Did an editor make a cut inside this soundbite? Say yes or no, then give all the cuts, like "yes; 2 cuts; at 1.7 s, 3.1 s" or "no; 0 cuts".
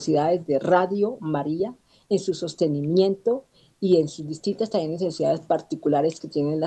no; 0 cuts